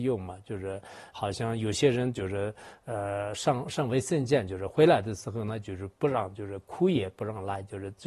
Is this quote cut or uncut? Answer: cut